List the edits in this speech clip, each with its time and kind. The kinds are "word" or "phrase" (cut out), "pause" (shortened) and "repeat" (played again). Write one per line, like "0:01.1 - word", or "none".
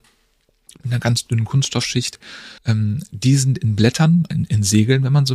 0:02.6 - pause
0:04.3 - phrase